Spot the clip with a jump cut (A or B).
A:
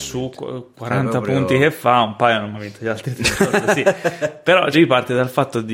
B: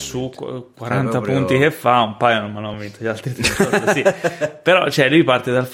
A